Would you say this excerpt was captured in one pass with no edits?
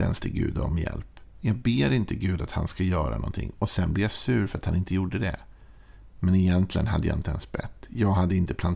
yes; 0 cuts

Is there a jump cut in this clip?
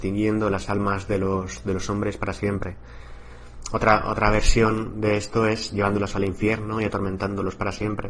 no; 0 cuts

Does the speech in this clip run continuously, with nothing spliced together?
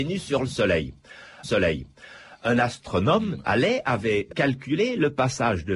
no; 2 cuts; at 1.4 s, 4.3 s

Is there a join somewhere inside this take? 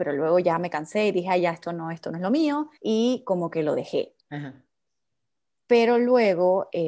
yes; 2 cuts; at 2.8 s, 4.2 s

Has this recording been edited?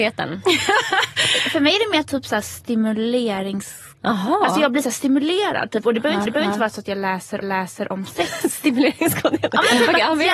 yes; 2 cuts; at 6.3 s, 7.4 s

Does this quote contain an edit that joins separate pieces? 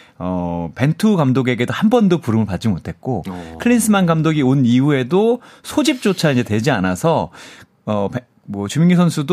no; 0 cuts

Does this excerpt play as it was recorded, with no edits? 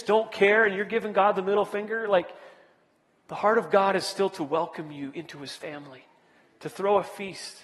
yes; 0 cuts

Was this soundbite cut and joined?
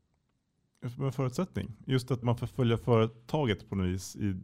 yes; 1 cut; at 2.2 s

